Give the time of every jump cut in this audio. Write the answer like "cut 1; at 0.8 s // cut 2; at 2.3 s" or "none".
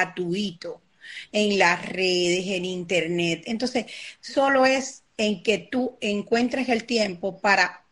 cut 1; at 5.1 s